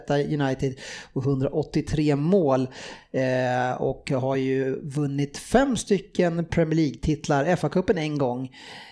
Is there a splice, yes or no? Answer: no